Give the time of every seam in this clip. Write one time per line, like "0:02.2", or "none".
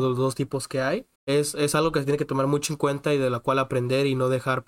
0:01.1